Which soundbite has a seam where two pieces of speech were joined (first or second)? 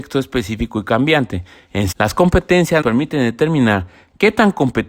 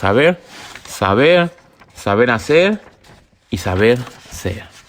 first